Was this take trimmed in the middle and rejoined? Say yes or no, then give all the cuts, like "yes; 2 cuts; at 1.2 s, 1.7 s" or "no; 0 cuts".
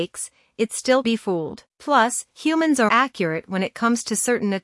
yes; 3 cuts; at 1.0 s, 1.7 s, 2.9 s